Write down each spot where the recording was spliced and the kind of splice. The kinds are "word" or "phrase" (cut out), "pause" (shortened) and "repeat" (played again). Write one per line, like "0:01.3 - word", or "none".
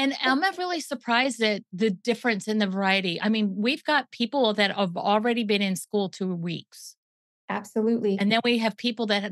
none